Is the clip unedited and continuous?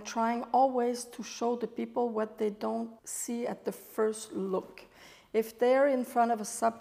no; 1 cut; at 3.0 s

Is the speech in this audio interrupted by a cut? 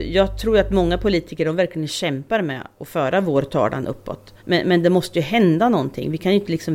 yes; 2 cuts; at 2.7 s, 4.4 s

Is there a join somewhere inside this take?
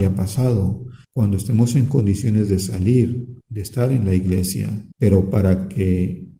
yes; 3 cuts; at 1.0 s, 3.4 s, 4.9 s

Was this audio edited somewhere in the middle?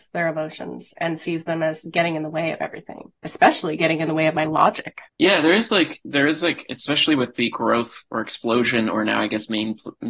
yes; 2 cuts; at 3.2 s, 5.1 s

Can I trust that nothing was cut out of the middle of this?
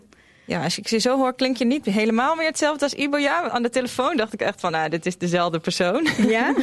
yes; 0 cuts

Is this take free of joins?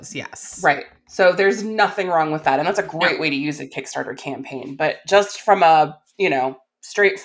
yes; 0 cuts

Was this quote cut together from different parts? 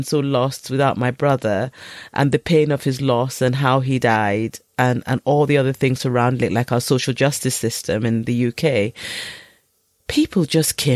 no; 0 cuts

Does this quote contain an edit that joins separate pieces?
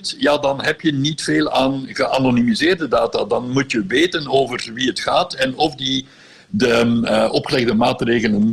no; 0 cuts

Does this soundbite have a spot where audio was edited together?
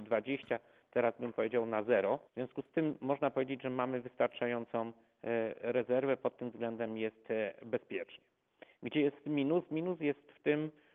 yes; 1 cut; at 2.3 s

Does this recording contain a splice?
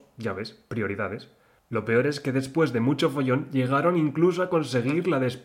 no; 0 cuts

